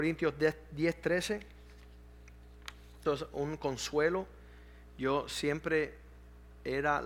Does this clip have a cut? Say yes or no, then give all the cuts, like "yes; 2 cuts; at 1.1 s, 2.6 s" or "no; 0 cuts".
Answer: yes; 1 cut; at 3.0 s